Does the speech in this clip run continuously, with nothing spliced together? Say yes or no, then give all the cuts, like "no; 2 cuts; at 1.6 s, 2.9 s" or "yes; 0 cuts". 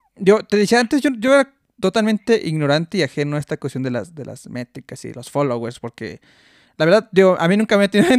yes; 0 cuts